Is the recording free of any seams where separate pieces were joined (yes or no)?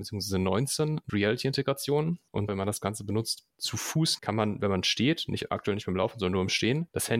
no